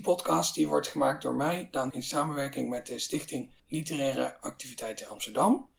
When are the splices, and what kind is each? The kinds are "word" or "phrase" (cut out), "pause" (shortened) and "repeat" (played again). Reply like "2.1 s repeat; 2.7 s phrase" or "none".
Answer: 1.9 s word; 3.6 s pause